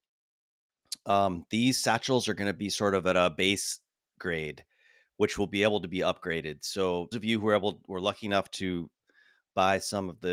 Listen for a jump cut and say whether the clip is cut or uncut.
cut